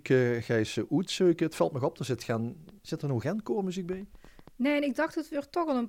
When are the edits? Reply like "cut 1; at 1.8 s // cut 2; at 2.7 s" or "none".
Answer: cut 1; at 2.8 s // cut 2; at 3.2 s